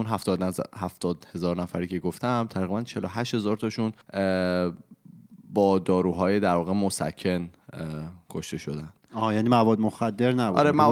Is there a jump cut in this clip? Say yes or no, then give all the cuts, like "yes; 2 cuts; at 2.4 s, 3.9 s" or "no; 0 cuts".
yes; 1 cut; at 4.0 s